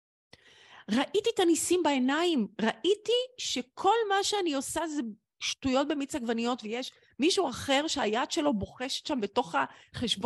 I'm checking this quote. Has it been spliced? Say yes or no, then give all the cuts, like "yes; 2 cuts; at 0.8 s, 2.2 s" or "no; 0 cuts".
no; 0 cuts